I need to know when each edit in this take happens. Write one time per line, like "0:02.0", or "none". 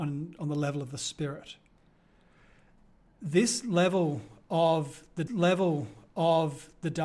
0:05.3